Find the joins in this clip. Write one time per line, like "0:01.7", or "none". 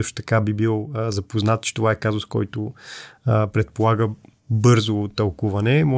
none